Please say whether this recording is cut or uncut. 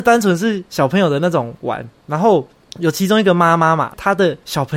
uncut